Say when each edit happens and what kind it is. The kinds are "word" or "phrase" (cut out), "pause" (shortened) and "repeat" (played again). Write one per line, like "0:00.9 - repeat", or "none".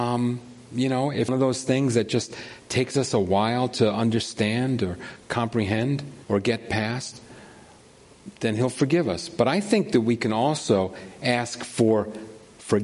0:01.3 - phrase
0:06.2 - pause